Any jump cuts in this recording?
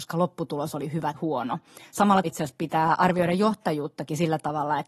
yes; 2 cuts; at 1.1 s, 2.2 s

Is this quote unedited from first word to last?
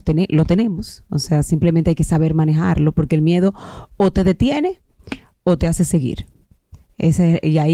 yes; 0 cuts

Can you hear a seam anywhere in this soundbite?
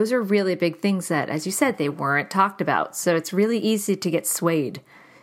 no; 0 cuts

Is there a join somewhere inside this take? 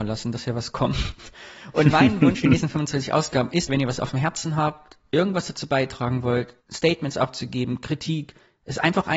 yes; 2 cuts; at 3.7 s, 6.6 s

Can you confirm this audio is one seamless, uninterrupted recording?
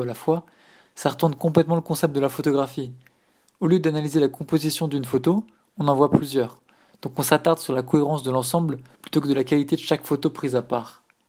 yes; 0 cuts

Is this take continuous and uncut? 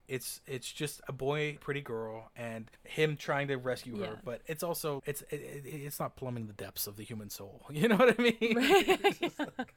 no; 3 cuts; at 1.6 s, 2.7 s, 5.0 s

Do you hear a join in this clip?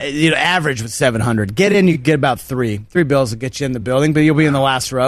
no; 0 cuts

